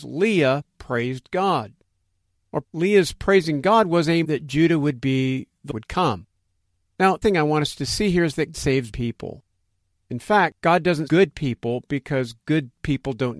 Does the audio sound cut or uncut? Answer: cut